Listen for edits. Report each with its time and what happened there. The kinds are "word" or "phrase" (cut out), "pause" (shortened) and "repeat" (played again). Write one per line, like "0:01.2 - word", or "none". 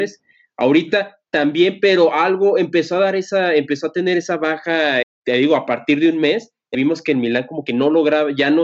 0:05.0 - word
0:06.7 - word

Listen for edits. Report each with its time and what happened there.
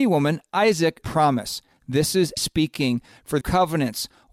0:01.0 - phrase
0:02.4 - word
0:03.4 - phrase

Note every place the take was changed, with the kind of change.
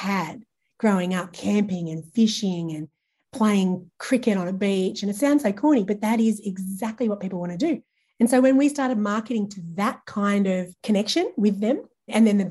none

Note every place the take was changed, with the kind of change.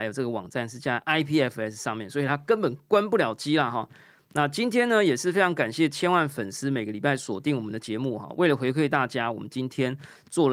none

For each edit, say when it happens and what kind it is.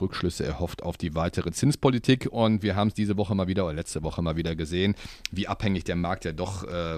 none

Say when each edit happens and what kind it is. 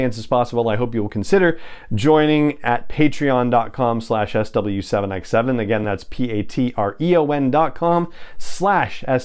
none

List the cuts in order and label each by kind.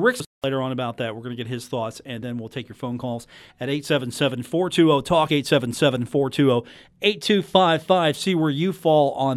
none

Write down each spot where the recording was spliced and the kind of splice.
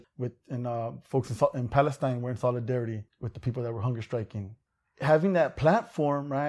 none

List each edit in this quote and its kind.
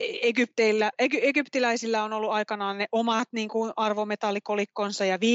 none

